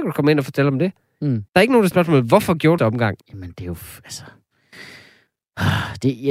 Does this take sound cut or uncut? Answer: cut